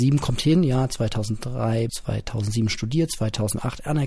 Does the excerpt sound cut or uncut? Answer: cut